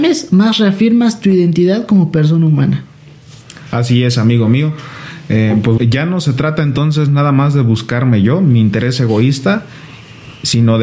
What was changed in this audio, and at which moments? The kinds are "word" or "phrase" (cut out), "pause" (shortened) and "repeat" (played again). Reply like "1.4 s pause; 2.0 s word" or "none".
5.8 s word